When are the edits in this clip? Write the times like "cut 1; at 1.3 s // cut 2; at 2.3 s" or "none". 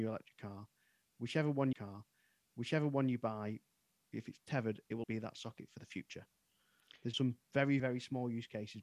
cut 1; at 1.7 s // cut 2; at 5.0 s // cut 3; at 7.1 s // cut 4; at 7.8 s